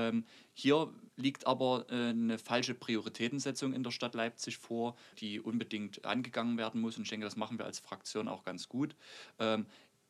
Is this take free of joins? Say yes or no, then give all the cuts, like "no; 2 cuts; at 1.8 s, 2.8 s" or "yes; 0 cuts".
no; 2 cuts; at 1.1 s, 5.1 s